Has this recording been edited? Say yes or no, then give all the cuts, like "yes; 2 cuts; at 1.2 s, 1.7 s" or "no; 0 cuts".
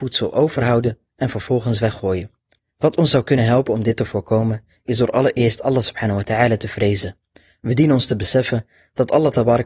no; 0 cuts